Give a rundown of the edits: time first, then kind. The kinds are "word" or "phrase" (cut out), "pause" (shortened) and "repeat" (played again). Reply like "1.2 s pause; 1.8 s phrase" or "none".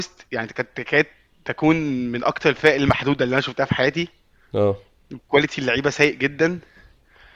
4.4 s pause